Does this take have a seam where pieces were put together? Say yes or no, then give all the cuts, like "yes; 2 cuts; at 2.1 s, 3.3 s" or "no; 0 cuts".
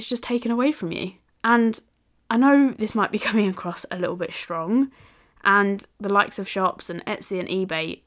yes; 1 cut; at 6.5 s